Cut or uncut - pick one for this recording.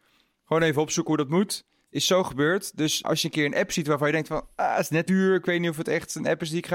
cut